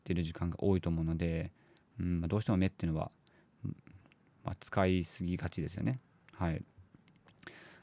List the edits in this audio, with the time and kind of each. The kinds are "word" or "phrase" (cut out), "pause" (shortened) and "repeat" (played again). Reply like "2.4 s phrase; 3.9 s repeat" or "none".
none